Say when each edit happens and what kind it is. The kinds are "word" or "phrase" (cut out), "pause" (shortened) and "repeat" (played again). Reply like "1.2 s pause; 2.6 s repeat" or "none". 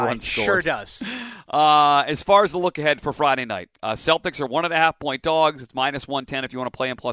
none